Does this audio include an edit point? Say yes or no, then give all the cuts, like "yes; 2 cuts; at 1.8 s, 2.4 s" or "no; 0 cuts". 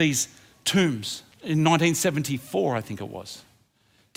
yes; 1 cut; at 1.3 s